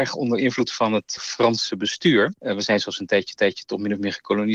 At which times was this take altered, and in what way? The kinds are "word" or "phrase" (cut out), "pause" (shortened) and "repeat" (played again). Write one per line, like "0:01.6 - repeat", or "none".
0:03.4 - repeat

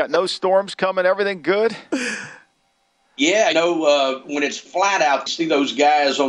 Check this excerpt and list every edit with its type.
0:03.5 - word
0:05.3 - phrase

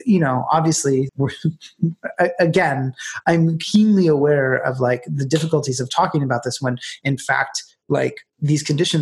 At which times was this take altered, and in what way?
0:01.1 - word

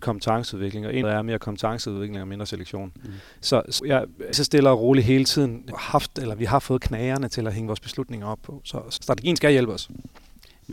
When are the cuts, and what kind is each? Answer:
0:01.0 - phrase
0:03.8 - word
0:04.3 - phrase
0:05.7 - word
0:09.0 - word

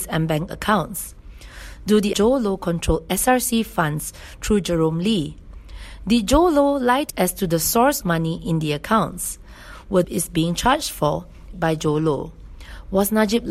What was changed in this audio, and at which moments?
0:02.1 - phrase
0:07.1 - phrase
0:08.0 - word
0:10.0 - phrase
0:11.5 - word

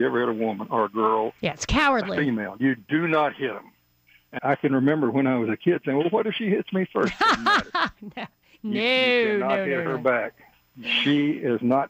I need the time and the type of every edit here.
0:04.4 - word

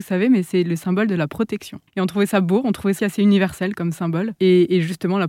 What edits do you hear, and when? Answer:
0:01.9 - pause
0:03.0 - word
0:03.8 - word
0:04.4 - pause

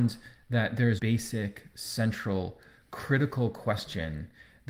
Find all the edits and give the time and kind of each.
0:01.0 - word

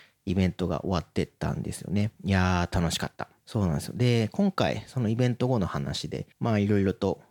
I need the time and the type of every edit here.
0:02.2 - pause
0:06.3 - pause

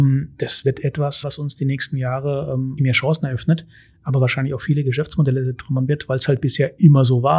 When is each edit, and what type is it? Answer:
0:01.2 - word
0:02.8 - word

